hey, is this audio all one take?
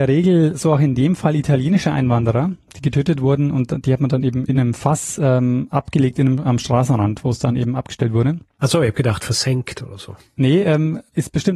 yes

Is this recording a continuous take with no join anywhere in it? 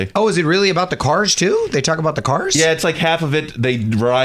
yes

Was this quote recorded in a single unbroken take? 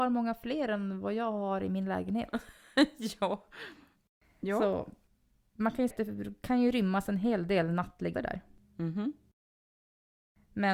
no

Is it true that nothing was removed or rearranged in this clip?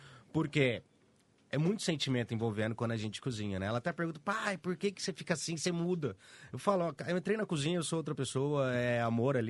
yes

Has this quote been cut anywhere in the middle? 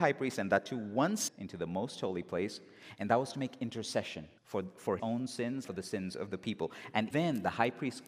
yes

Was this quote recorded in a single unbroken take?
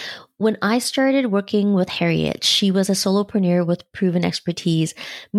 yes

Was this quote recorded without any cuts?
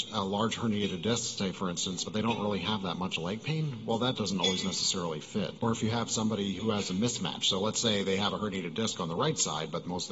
yes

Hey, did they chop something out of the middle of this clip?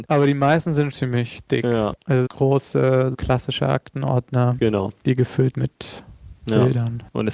yes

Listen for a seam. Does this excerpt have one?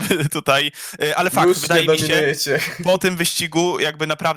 no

